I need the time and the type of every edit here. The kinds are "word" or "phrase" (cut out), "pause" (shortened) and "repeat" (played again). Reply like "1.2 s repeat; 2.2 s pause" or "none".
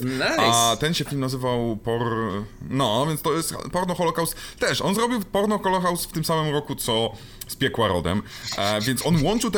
none